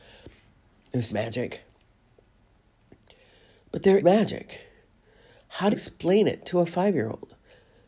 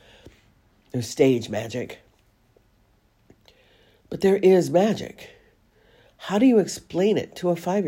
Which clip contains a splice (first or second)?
first